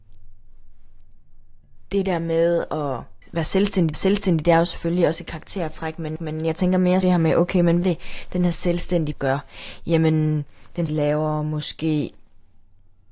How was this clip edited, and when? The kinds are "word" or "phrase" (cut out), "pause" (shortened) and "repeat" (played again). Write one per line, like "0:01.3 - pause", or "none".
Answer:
0:03.2 - pause
0:03.9 - repeat
0:06.2 - repeat
0:07.0 - phrase
0:07.8 - word
0:09.1 - word
0:10.9 - word